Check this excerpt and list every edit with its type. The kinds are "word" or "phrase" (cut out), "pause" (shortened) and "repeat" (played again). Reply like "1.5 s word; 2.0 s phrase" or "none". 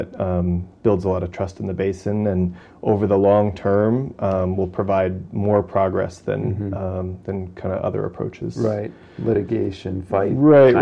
none